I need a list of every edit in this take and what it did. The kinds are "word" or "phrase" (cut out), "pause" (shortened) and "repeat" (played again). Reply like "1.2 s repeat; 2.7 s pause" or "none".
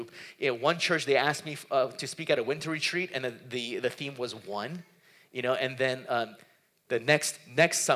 none